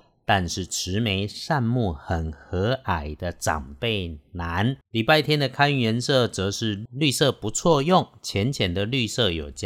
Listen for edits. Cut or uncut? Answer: cut